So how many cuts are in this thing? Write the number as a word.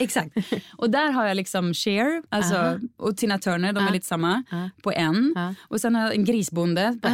one